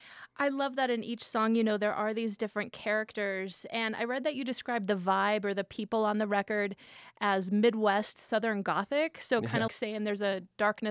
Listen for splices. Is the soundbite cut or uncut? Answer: cut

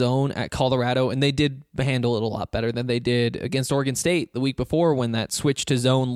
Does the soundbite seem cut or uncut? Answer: uncut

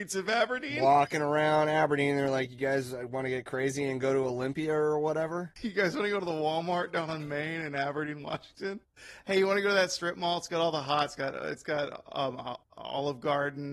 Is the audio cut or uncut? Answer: uncut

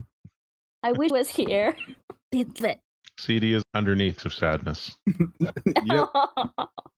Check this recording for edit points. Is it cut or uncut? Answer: cut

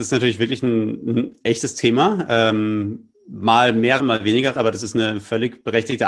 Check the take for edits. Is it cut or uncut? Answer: cut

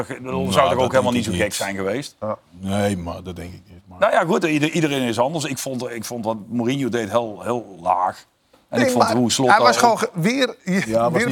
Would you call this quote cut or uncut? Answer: uncut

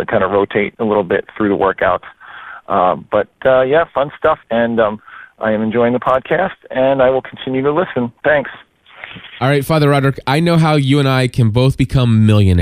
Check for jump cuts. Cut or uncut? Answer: cut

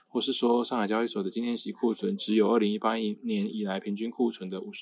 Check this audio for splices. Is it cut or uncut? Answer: uncut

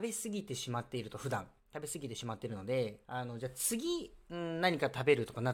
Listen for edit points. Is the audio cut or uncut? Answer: cut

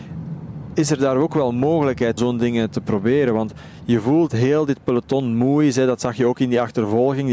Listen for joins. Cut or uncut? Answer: cut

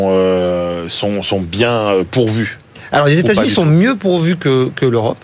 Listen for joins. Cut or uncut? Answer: uncut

